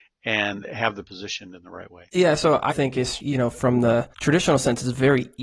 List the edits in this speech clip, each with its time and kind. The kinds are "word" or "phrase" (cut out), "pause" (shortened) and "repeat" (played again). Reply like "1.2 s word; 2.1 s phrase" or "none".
1.0 s word; 2.1 s pause; 2.7 s word; 3.2 s word; 4.1 s pause